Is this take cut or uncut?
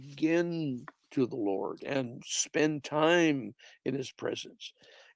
uncut